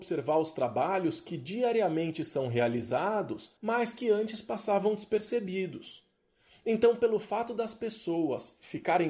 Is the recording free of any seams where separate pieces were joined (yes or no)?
no